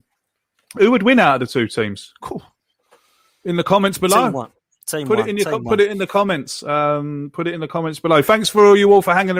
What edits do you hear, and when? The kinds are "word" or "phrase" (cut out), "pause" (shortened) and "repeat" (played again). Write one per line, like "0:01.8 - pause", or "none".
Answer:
none